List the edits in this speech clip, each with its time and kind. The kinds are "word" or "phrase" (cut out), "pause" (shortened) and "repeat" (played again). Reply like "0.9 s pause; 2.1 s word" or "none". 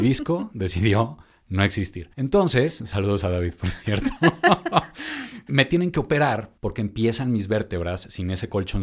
2.1 s pause; 5.5 s word; 6.6 s pause